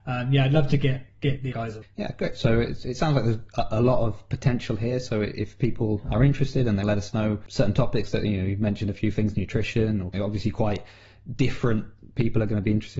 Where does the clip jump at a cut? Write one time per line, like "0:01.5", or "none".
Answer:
0:01.1
0:01.5
0:06.8
0:10.1